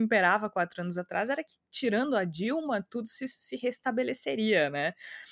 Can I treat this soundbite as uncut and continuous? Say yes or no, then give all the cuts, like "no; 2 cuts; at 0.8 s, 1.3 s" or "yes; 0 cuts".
yes; 0 cuts